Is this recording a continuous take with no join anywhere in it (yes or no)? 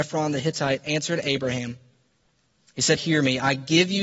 no